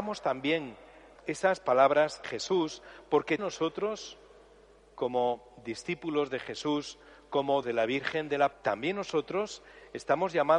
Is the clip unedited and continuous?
no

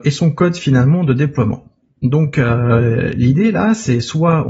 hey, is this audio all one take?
yes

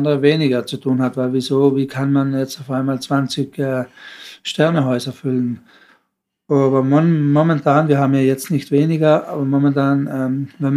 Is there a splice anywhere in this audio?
no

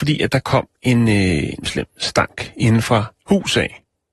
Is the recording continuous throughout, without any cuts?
no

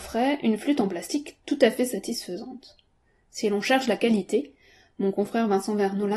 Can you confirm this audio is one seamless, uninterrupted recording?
yes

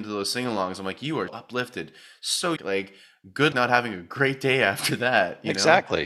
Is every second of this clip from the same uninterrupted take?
no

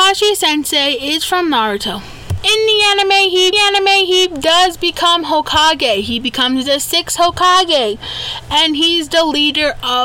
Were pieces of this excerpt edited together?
yes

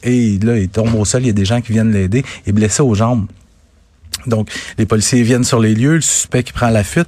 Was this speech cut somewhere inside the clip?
no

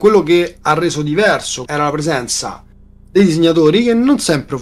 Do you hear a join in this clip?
yes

